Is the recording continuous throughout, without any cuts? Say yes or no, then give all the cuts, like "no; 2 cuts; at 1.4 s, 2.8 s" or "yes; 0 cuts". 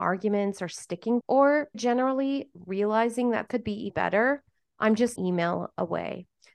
no; 5 cuts; at 1.2 s, 1.7 s, 3.5 s, 3.9 s, 5.2 s